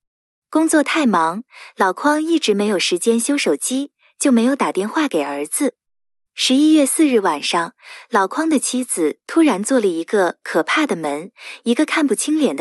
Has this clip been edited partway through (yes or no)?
no